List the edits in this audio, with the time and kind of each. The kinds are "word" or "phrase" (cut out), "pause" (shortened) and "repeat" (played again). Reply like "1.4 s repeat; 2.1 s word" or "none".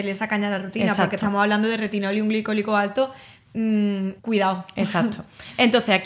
4.2 s pause

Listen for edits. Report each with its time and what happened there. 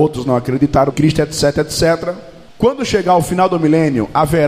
0.9 s phrase; 2.5 s pause

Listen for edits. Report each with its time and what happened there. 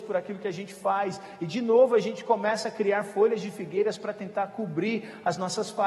none

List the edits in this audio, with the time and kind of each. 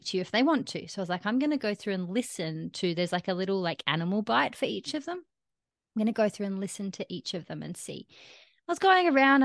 none

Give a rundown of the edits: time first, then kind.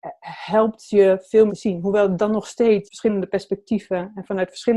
1.5 s phrase; 2.9 s phrase

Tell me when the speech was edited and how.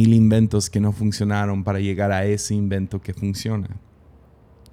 none

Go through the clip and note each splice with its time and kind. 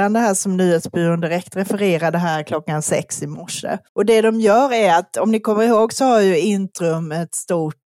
3.9 s pause

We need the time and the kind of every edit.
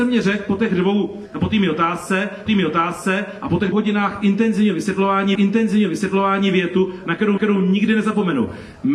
2.5 s repeat; 3.7 s word; 5.3 s repeat; 7.4 s repeat

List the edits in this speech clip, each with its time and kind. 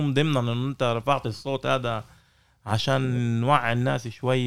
none

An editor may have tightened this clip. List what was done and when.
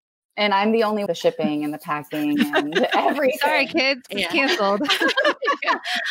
1.1 s phrase; 4.1 s word

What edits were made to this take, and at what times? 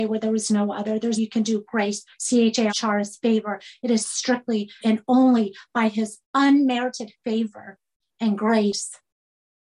1.2 s word; 2.1 s word; 2.7 s phrase; 4.8 s word; 6.2 s pause

